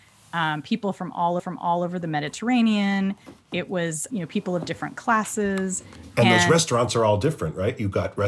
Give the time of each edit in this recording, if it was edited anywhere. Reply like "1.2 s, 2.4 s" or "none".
1.4 s, 4.1 s